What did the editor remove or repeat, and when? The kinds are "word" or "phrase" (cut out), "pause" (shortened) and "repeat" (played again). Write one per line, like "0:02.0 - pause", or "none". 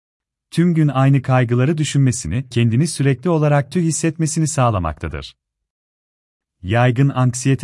0:02.5 - word
0:03.7 - word